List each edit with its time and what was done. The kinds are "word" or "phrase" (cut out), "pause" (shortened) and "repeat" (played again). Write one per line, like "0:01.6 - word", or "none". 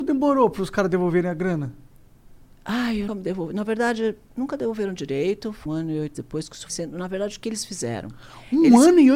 0:03.1 - word
0:05.7 - word
0:06.1 - word
0:06.7 - word